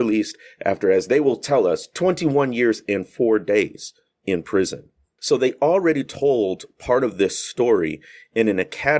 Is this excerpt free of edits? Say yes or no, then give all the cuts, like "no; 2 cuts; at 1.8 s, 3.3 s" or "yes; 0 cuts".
yes; 0 cuts